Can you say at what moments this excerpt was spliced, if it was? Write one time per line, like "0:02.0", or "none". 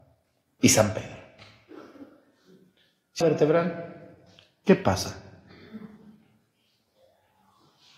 0:03.2